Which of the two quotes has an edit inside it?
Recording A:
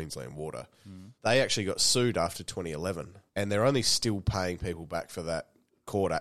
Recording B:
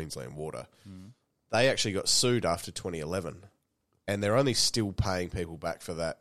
A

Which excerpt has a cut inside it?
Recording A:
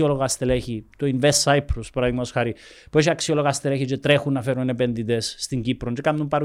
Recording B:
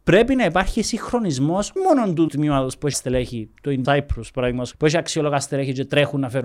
B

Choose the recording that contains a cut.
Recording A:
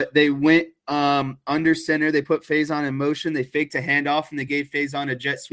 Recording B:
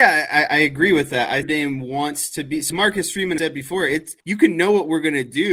B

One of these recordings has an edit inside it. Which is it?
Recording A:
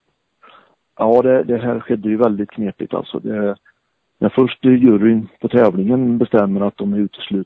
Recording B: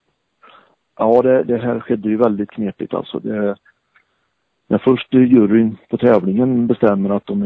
A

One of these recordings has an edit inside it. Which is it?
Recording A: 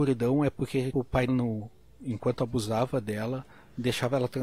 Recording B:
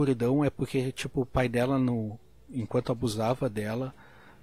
A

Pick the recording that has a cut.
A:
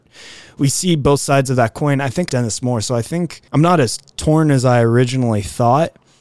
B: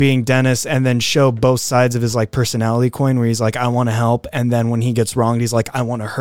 A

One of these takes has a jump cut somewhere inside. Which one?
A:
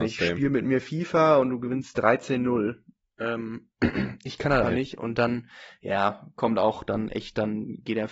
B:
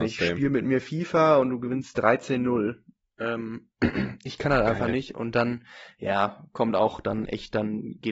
A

